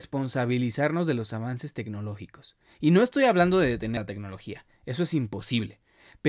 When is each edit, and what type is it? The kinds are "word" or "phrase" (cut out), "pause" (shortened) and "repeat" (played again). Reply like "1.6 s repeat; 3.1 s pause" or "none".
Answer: 4.0 s word